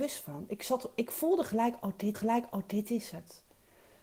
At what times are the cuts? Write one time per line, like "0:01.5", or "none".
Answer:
0:02.1